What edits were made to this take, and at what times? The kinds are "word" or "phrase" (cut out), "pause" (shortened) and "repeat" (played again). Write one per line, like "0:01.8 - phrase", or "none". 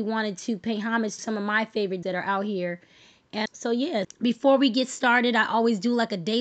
0:01.2 - word
0:02.0 - word
0:03.5 - word
0:04.0 - word